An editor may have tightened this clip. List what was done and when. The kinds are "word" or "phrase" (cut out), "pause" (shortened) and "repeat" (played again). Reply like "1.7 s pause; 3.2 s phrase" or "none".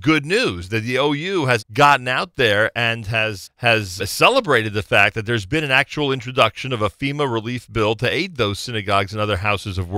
1.6 s word; 3.4 s word; 4.0 s word